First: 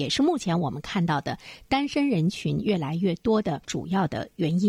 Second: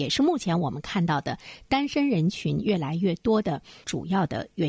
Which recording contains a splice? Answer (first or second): first